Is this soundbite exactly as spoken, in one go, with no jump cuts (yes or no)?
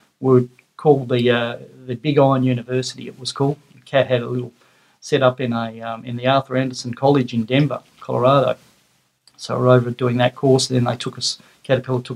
yes